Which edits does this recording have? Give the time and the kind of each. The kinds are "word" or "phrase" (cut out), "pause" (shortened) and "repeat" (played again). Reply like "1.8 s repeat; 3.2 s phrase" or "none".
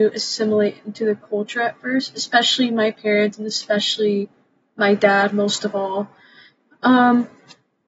none